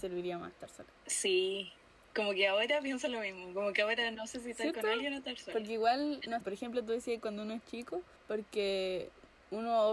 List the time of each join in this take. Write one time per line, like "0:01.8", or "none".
0:01.0
0:06.4